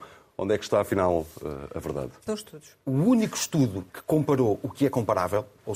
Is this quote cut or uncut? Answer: cut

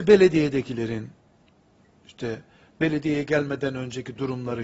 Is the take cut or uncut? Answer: uncut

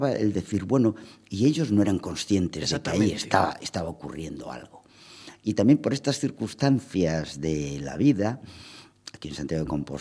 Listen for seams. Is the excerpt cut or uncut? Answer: uncut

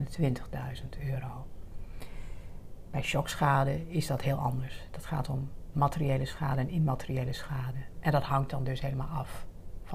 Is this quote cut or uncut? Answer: uncut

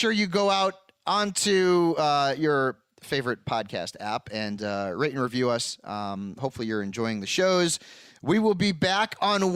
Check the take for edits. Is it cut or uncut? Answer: uncut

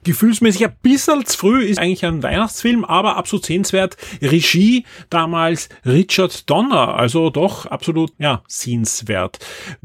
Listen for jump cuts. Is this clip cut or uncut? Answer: cut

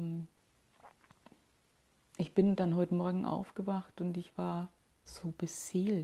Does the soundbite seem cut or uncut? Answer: uncut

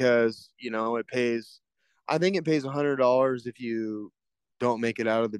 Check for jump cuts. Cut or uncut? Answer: uncut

